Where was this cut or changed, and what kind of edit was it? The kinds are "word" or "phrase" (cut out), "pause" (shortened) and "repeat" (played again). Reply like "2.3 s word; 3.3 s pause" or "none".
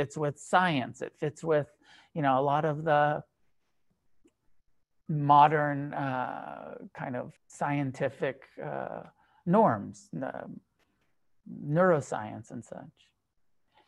7.4 s pause